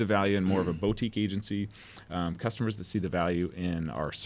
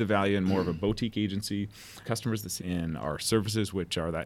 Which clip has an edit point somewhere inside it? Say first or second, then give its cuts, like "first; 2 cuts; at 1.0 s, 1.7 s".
second; 2 cuts; at 2.0 s, 2.6 s